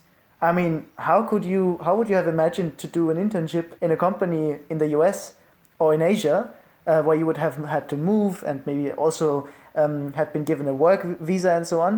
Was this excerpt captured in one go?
no; 1 cut; at 3.8 s

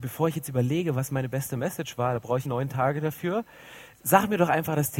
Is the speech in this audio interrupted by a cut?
yes; 1 cut; at 2.4 s

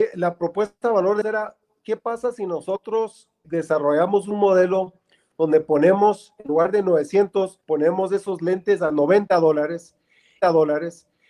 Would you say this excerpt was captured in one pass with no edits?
no; 4 cuts; at 1.2 s, 3.4 s, 7.6 s, 10.4 s

